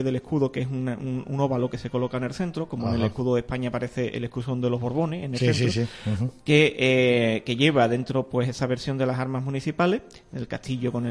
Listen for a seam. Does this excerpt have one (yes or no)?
no